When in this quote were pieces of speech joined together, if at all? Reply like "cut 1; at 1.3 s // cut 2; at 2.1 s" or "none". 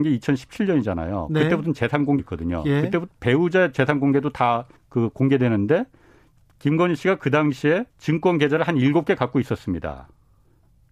cut 1; at 2.2 s // cut 2; at 4.8 s // cut 3; at 7.9 s